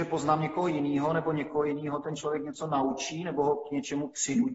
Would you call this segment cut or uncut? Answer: uncut